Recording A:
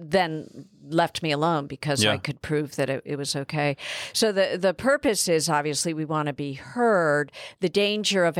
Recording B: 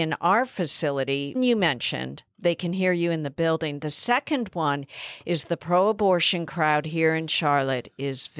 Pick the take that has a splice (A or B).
B